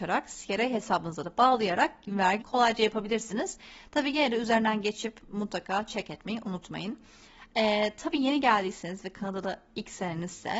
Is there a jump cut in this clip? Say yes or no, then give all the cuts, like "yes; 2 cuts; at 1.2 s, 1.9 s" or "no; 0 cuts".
yes; 1 cut; at 2.4 s